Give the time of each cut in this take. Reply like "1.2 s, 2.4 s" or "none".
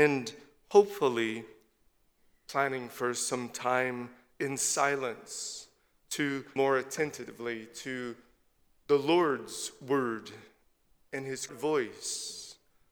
6.6 s, 11.5 s

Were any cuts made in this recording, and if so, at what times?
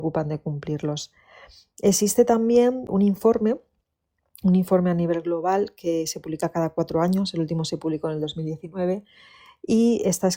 none

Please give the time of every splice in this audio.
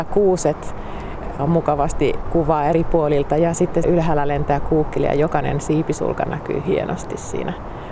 1.4 s, 3.8 s

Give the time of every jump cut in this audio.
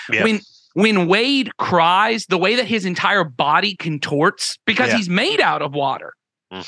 none

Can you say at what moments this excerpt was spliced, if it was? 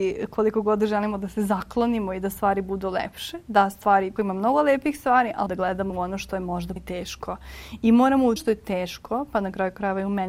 4.2 s, 5.5 s, 5.9 s, 6.8 s, 8.4 s

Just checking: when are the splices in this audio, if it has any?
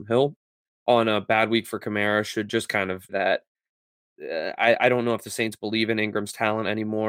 3.1 s

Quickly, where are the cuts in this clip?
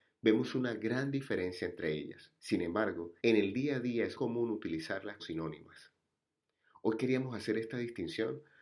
2.4 s, 3.2 s, 4.1 s, 5.2 s

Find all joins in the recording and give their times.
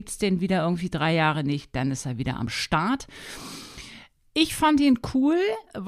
none

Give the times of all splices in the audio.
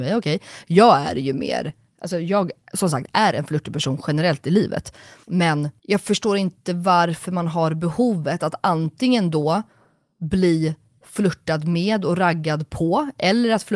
none

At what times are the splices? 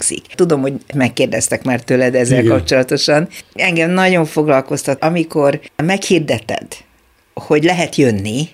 0.9 s, 5.0 s

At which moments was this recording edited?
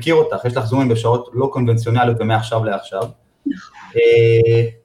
none

